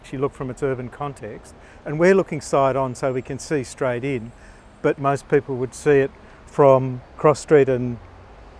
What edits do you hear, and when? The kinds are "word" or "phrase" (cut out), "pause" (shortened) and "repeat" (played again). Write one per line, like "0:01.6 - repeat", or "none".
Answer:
none